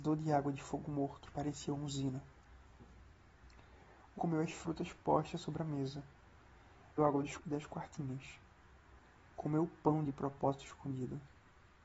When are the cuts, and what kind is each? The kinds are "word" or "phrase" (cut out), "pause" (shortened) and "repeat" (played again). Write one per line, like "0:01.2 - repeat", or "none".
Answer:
0:01.3 - word
0:04.2 - word
0:07.0 - word
0:07.4 - word